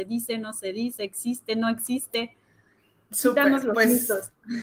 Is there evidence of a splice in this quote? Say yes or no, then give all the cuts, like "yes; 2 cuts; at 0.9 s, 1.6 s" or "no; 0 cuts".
no; 0 cuts